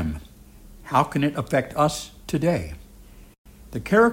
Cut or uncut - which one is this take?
uncut